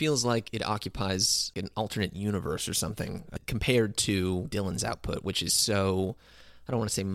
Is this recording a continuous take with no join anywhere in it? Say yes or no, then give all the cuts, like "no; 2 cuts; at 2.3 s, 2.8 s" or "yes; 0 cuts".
yes; 0 cuts